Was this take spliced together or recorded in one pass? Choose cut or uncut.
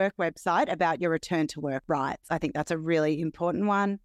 uncut